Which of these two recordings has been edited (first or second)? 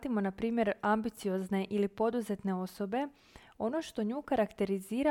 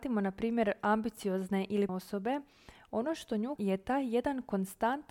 second